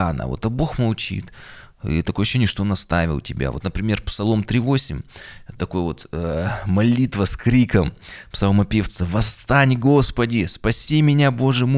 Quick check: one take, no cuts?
yes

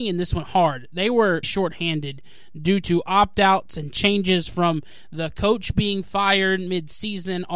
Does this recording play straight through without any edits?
no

